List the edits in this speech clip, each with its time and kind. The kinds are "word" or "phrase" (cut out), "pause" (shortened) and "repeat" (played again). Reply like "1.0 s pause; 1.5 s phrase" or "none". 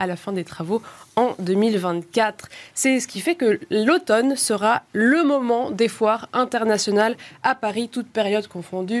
none